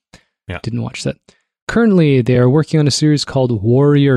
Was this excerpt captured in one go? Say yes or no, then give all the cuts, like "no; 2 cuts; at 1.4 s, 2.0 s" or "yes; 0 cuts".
yes; 0 cuts